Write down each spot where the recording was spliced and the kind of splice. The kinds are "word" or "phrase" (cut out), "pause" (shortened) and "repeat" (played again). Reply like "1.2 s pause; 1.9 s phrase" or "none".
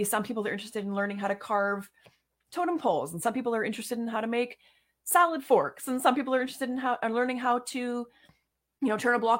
none